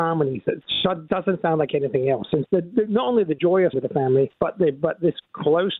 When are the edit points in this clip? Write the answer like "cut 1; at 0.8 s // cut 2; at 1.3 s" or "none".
cut 1; at 2.5 s // cut 2; at 3.7 s // cut 3; at 4.4 s